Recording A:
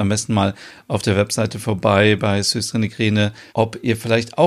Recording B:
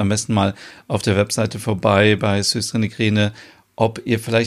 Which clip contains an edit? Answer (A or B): A